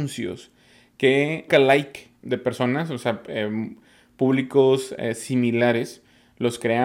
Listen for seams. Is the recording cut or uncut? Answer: cut